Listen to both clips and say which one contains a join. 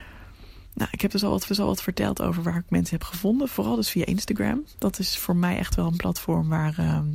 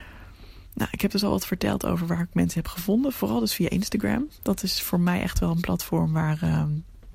first; 1 cut; at 1.5 s

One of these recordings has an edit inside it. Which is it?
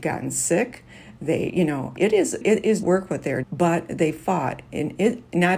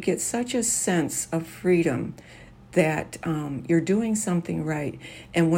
first; 4 cuts; at 2.0 s, 2.4 s, 2.8 s, 3.4 s

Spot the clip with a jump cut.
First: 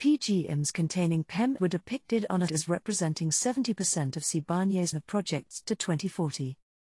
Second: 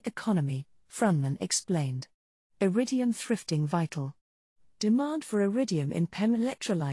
first; 3 cuts; at 1.6 s, 2.5 s, 4.9 s

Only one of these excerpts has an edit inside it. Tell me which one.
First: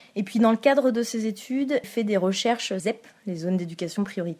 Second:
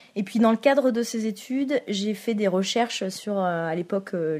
first; 2 cuts; at 1.8 s, 2.8 s

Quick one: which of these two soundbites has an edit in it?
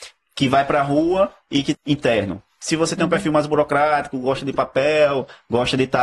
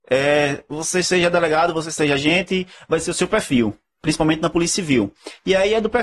first; 1 cut; at 1.7 s

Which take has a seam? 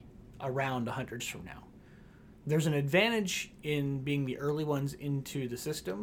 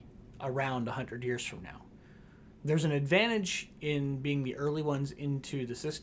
first; 1 cut; at 1.2 s

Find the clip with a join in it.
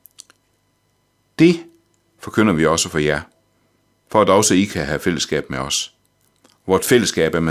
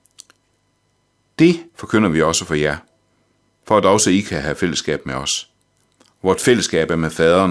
second; 1 cut; at 1.7 s

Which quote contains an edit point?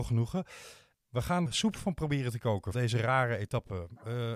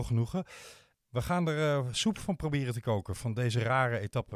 first; 2 cuts; at 1.5 s, 2.7 s

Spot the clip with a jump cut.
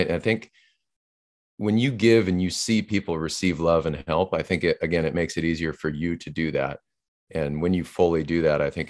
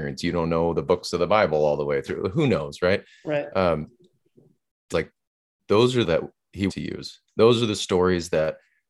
second; 3 cuts; at 4.9 s, 6.0 s, 6.7 s

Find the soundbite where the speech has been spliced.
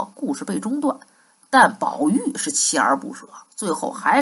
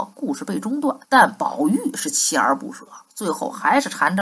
second; 1 cut; at 1.0 s

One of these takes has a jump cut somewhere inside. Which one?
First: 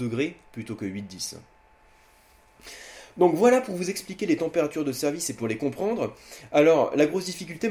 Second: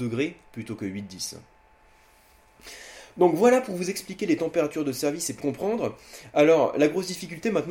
second; 1 cut; at 5.4 s

